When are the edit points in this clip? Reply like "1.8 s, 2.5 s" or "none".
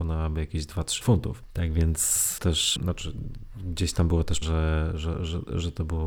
1.0 s, 2.4 s, 2.8 s, 4.4 s

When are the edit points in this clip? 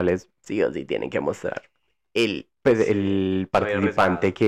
2.5 s

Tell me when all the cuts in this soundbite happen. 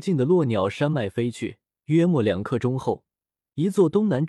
1.7 s

